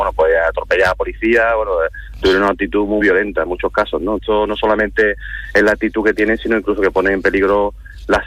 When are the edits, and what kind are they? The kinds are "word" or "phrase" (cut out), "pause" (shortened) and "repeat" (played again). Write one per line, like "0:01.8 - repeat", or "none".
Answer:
0:03.0 - word
0:04.2 - word